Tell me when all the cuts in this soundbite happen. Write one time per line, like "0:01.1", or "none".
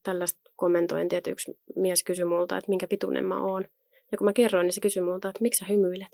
none